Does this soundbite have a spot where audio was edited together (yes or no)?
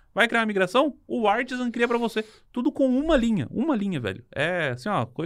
no